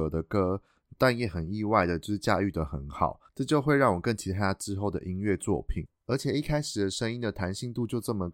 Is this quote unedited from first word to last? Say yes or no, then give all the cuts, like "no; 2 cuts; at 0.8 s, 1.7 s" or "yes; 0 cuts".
no; 1 cut; at 3.3 s